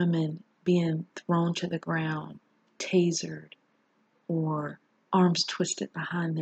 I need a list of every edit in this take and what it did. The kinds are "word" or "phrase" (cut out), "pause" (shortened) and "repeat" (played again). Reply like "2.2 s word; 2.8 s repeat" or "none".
none